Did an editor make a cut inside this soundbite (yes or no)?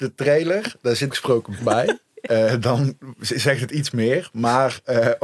yes